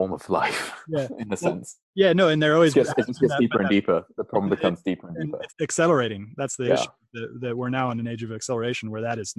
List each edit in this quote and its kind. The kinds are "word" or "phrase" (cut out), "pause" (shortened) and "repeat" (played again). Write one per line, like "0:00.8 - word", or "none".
0:05.5 - pause